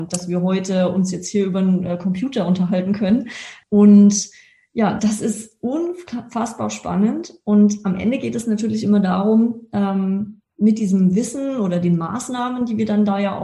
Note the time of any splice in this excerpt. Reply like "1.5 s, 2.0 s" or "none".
5.0 s